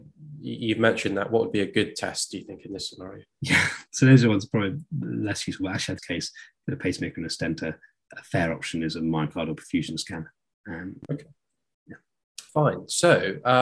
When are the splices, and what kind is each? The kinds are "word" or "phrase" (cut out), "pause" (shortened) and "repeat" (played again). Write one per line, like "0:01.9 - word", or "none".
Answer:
0:06.0 - phrase
0:12.5 - pause